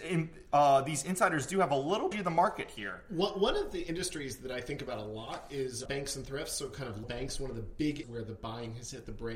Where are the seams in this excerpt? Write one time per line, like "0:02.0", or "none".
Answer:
0:02.1
0:05.9
0:07.0
0:08.0